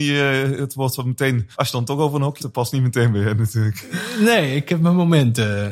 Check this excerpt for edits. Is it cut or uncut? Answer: cut